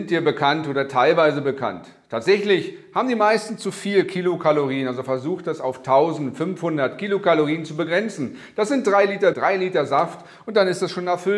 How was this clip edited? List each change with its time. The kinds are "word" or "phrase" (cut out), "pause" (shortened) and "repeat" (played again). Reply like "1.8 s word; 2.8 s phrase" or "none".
9.3 s word